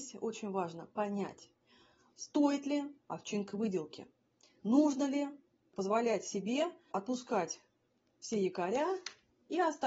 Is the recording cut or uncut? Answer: uncut